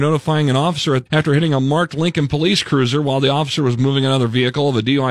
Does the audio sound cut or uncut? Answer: cut